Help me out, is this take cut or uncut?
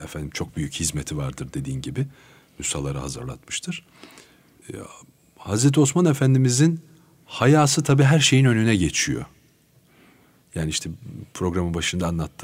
uncut